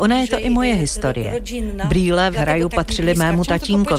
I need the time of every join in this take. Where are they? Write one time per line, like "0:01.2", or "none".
0:02.3